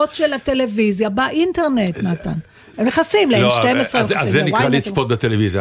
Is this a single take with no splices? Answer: yes; 0 cuts

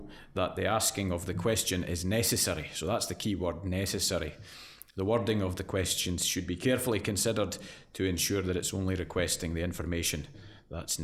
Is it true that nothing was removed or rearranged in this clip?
yes; 0 cuts

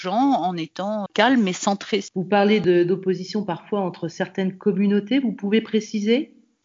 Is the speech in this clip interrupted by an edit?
yes; 1 cut; at 1.1 s

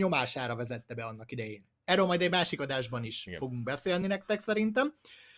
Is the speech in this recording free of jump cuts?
yes; 0 cuts

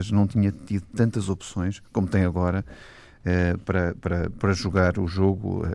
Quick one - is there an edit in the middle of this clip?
no; 0 cuts

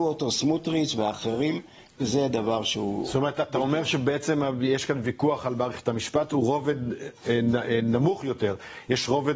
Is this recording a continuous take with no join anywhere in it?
yes; 0 cuts

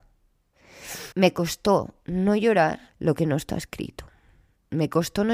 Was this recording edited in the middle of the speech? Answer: yes; 2 cuts; at 1.1 s, 2.9 s

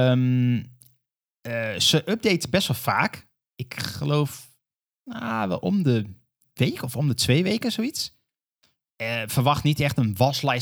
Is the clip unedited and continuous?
yes; 0 cuts

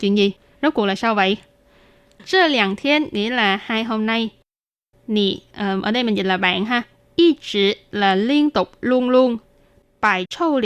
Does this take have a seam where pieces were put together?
no; 0 cuts

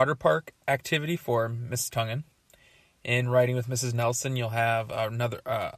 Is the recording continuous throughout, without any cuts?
yes; 0 cuts

